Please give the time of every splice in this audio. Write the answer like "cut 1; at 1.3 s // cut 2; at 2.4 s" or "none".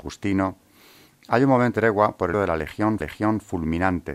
cut 1; at 1.7 s // cut 2; at 2.3 s // cut 3; at 3.0 s